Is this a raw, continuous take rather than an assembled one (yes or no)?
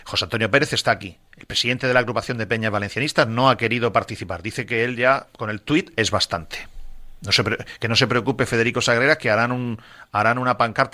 no